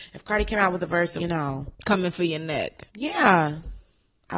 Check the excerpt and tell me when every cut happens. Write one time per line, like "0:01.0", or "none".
0:01.2
0:01.7
0:02.9